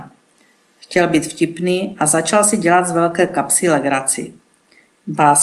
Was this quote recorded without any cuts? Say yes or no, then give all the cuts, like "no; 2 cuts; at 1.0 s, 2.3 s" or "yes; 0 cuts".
yes; 0 cuts